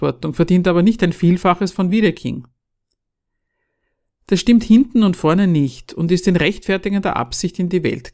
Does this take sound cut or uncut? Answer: uncut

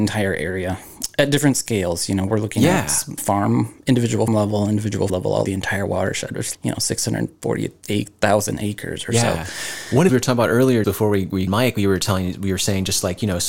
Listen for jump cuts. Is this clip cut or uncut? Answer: cut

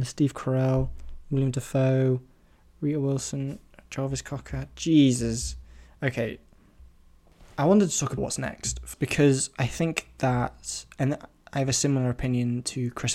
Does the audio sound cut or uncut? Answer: cut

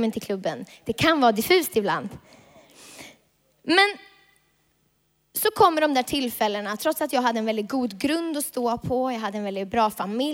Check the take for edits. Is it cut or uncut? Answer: uncut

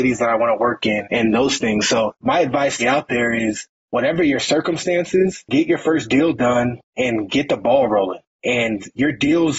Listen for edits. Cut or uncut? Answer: cut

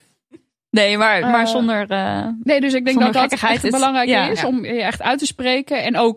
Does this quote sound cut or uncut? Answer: uncut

